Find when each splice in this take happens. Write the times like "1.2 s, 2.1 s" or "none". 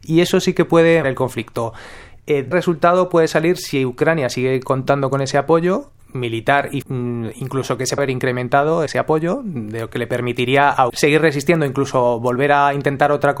1.0 s, 2.5 s, 6.8 s, 8.0 s, 8.9 s, 10.9 s